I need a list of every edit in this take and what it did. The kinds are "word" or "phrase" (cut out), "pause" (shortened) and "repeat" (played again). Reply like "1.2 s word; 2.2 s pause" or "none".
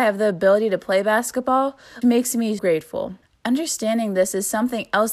2.0 s word; 2.6 s word; 3.2 s pause